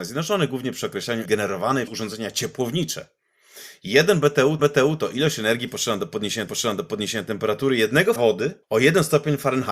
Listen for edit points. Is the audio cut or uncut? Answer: cut